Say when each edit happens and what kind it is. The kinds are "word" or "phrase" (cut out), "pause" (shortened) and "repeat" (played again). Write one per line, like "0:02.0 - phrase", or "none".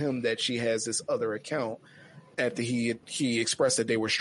0:02.3 - word
0:03.0 - pause